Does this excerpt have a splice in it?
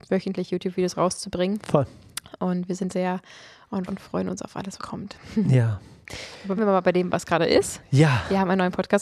yes; 4 cuts; at 2.9 s, 3.9 s, 4.8 s, 6.6 s

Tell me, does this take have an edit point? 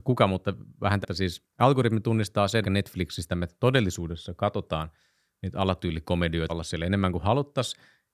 yes; 5 cuts; at 1.0 s, 1.5 s, 2.6 s, 3.3 s, 6.5 s

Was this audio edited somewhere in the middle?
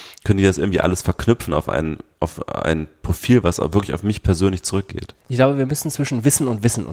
yes; 1 cut; at 5.2 s

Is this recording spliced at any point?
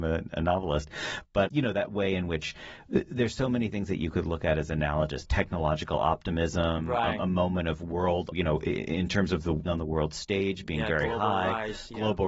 yes; 3 cuts; at 1.5 s, 8.3 s, 9.7 s

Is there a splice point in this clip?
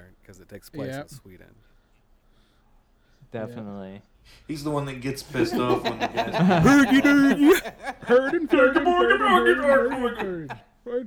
no; 0 cuts

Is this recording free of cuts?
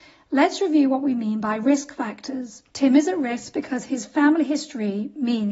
no; 1 cut; at 2.7 s

